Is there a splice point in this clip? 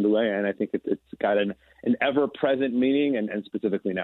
no; 0 cuts

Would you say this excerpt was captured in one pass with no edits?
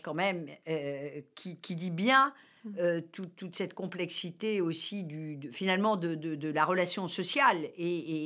yes; 0 cuts

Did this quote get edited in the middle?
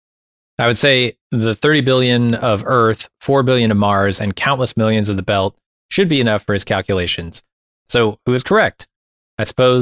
no; 0 cuts

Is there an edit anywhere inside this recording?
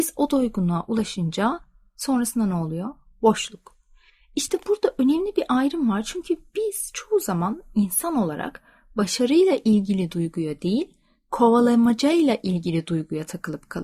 no; 0 cuts

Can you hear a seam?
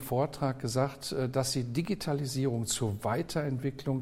no; 0 cuts

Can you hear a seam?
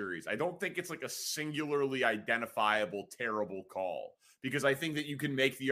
no; 0 cuts

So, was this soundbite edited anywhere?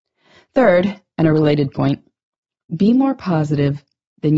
no; 0 cuts

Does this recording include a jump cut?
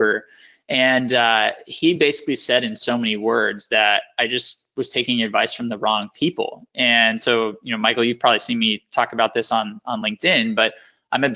no; 0 cuts

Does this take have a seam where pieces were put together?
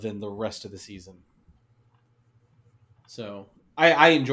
no; 0 cuts

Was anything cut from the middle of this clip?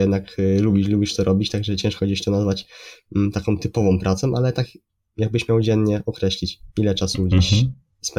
no; 0 cuts

